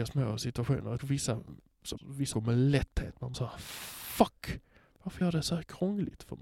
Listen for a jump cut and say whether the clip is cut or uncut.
cut